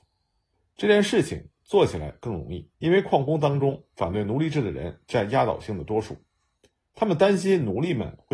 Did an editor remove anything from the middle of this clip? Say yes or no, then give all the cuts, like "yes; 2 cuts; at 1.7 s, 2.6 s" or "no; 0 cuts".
yes; 1 cut; at 2.7 s